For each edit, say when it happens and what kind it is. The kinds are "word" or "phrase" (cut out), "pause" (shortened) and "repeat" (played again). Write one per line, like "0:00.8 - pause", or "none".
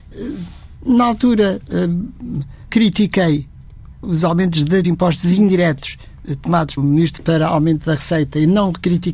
0:02.7 - word
0:04.0 - word
0:04.8 - phrase
0:06.8 - word
0:07.2 - word